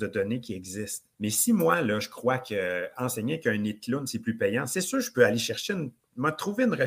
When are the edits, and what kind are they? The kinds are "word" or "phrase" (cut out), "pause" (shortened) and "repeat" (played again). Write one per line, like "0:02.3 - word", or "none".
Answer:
0:01.1 - pause